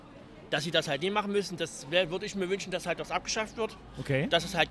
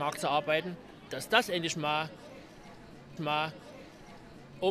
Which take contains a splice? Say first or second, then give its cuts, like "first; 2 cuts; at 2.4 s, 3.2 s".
second; 2 cuts; at 1.1 s, 3.2 s